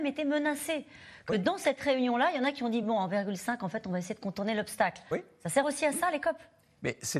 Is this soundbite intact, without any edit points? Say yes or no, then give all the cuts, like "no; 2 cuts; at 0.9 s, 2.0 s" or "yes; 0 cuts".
yes; 0 cuts